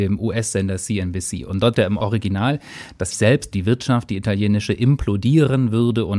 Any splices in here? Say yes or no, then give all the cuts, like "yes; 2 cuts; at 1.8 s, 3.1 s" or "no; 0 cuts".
yes; 3 cuts; at 1.7 s, 3.1 s, 3.5 s